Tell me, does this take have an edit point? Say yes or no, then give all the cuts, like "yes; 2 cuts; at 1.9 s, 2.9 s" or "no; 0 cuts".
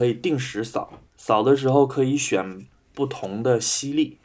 yes; 1 cut; at 1.1 s